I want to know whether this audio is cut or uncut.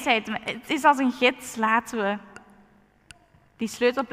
uncut